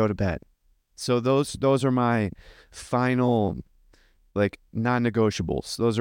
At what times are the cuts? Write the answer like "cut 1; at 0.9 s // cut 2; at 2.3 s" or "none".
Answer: none

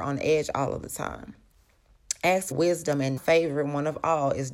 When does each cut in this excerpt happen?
cut 1; at 2.5 s // cut 2; at 3.2 s

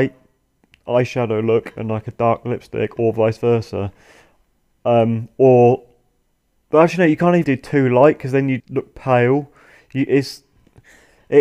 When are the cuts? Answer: cut 1; at 7.4 s // cut 2; at 8.6 s

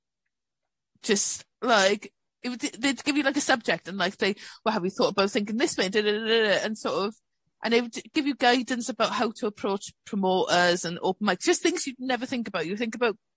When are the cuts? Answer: cut 1; at 1.5 s

